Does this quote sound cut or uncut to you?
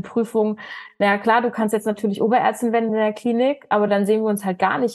uncut